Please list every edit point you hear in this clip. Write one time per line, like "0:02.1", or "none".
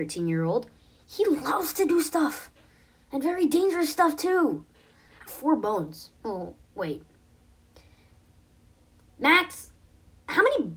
0:05.3
0:06.2